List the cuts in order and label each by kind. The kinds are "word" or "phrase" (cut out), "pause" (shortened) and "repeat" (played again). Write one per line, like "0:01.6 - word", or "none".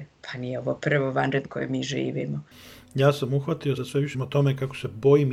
0:01.5 - word
0:03.8 - word
0:04.1 - word